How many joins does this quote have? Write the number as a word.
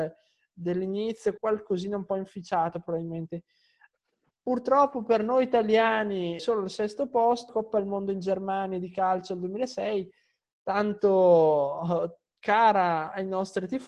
three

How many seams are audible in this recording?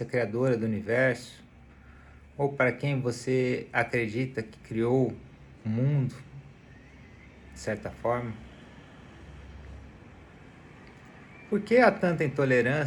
one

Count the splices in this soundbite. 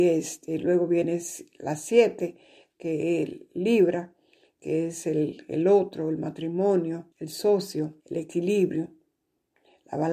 two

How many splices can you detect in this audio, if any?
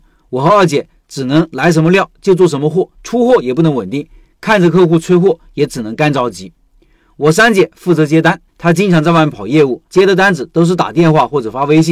three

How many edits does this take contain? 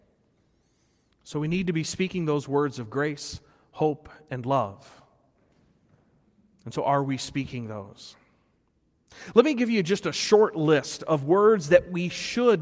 zero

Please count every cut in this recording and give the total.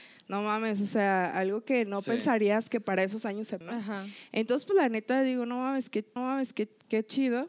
two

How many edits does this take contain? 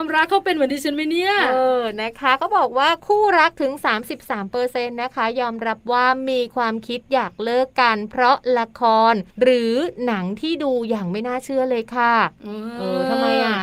one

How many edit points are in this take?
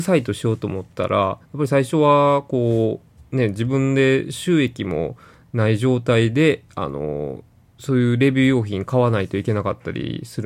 one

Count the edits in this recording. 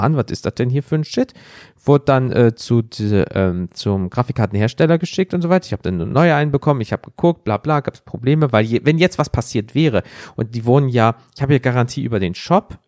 zero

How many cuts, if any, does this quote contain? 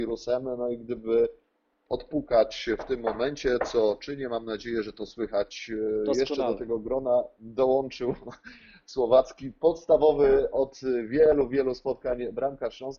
zero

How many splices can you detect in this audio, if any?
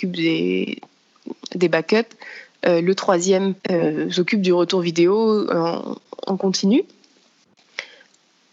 one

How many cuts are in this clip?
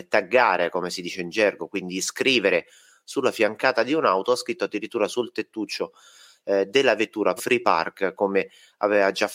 one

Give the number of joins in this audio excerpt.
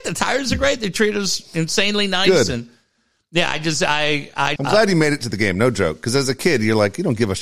one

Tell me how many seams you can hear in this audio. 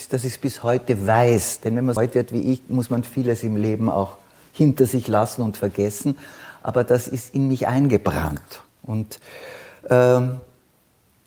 one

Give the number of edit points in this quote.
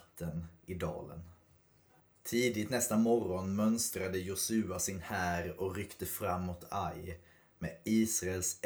zero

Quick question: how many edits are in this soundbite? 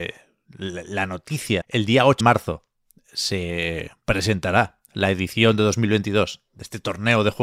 two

